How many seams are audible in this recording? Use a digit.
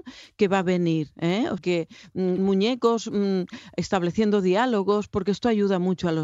2